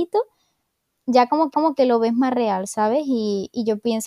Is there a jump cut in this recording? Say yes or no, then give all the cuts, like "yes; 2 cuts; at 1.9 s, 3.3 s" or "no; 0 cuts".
yes; 1 cut; at 1.5 s